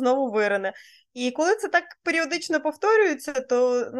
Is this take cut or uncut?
uncut